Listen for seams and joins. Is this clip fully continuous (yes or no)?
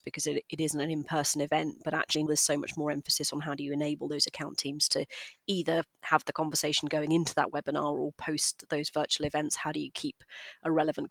no